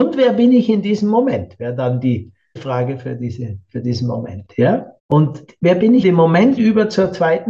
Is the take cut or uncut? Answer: cut